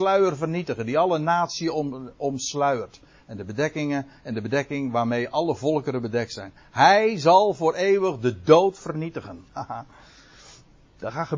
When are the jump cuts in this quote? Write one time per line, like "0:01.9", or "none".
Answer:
0:09.5